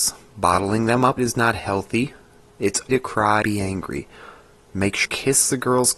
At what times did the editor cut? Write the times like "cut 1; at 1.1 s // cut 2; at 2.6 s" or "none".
cut 1; at 1.2 s // cut 2; at 2.9 s // cut 3; at 3.4 s // cut 4; at 5.0 s